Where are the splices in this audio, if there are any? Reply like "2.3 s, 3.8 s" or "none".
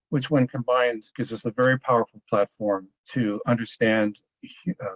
1.1 s, 3.0 s